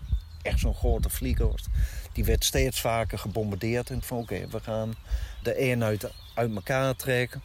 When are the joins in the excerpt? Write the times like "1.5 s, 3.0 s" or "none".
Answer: 4.0 s, 5.4 s